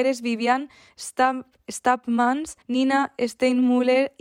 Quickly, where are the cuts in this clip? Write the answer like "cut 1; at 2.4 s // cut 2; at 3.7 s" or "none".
cut 1; at 2.6 s